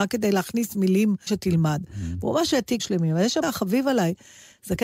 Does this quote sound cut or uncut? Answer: cut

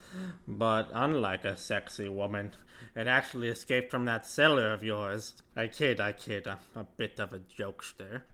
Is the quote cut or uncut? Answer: uncut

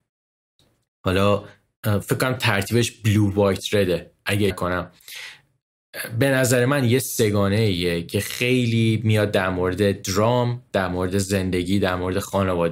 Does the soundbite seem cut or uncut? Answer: cut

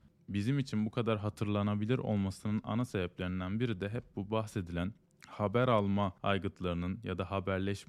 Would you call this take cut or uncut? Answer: cut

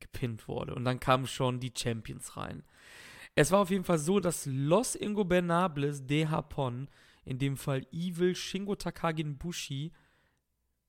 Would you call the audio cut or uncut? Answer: uncut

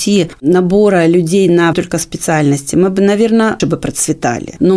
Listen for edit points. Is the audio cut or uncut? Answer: cut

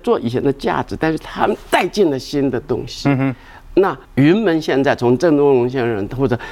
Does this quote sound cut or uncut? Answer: cut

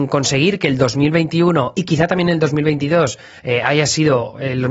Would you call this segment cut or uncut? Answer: uncut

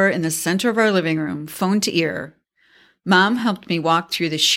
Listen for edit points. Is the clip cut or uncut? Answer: uncut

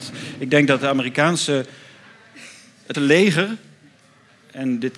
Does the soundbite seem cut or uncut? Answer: cut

